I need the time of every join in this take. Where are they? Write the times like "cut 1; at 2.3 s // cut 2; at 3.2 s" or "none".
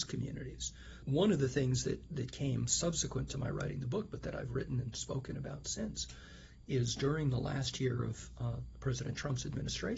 none